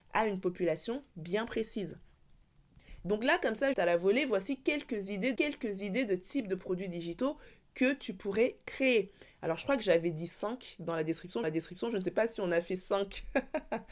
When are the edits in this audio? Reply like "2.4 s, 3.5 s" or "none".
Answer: 3.7 s, 5.4 s, 11.4 s